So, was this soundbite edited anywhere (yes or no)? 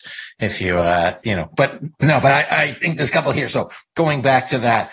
no